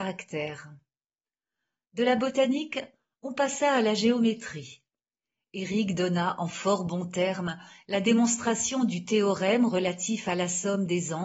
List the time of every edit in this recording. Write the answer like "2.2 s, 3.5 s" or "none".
none